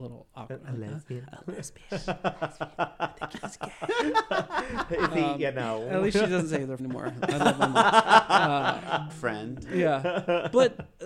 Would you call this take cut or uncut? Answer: cut